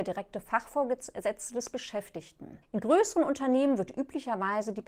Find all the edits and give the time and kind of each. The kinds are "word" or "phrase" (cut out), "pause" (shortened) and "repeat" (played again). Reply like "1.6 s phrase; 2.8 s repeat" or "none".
2.6 s pause